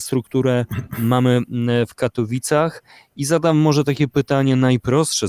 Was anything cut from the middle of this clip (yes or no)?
no